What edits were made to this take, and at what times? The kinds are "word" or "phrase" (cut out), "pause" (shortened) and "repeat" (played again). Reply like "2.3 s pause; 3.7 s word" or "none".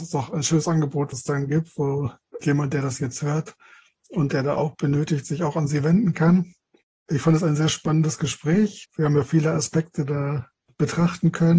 1.1 s word; 2.4 s word; 4.7 s word